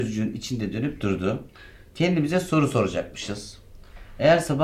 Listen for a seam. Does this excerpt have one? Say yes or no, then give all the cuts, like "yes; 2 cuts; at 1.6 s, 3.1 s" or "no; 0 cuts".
no; 0 cuts